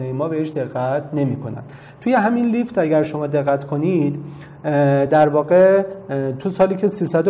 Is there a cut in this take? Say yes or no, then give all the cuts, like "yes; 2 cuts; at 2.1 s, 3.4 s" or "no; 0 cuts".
no; 0 cuts